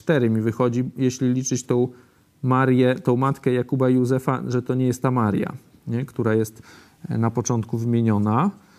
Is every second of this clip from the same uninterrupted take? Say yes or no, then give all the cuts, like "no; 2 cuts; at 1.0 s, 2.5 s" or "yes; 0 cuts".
yes; 0 cuts